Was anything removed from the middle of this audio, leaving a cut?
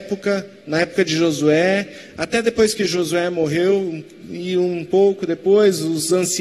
no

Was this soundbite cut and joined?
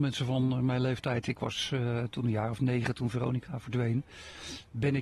no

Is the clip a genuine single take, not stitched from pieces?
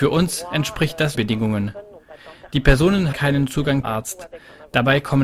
no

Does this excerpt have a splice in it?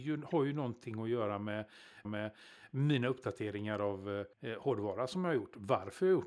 yes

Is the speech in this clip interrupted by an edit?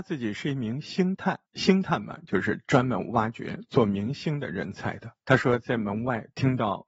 yes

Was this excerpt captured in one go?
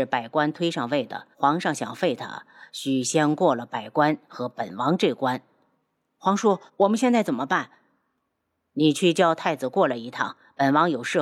no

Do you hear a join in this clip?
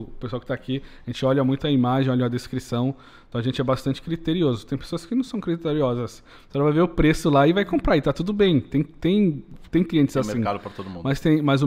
no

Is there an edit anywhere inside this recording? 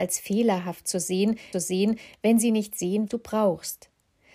yes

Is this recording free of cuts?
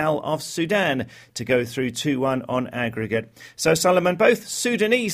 yes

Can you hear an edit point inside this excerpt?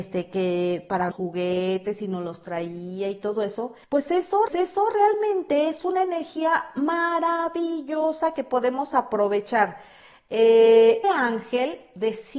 yes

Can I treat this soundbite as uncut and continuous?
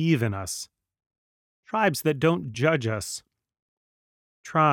yes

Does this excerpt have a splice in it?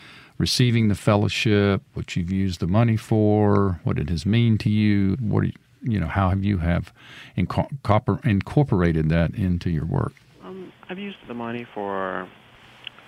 yes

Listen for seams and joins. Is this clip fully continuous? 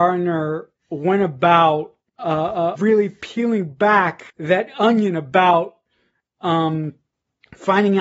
no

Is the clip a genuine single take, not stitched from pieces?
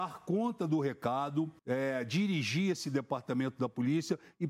no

